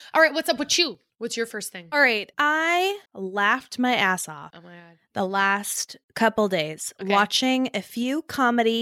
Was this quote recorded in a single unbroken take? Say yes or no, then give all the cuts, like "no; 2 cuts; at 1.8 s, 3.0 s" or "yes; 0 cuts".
no; 2 cuts; at 3.1 s, 6.0 s